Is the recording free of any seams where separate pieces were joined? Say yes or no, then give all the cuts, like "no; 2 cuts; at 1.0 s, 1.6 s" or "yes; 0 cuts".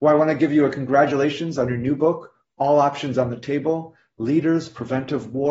yes; 0 cuts